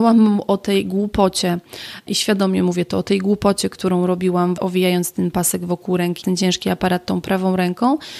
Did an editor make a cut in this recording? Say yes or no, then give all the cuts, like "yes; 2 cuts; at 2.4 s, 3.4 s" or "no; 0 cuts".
yes; 2 cuts; at 4.6 s, 6.2 s